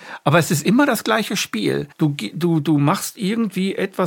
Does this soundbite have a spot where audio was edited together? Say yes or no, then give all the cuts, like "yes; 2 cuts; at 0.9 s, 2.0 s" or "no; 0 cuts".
yes; 1 cut; at 1.9 s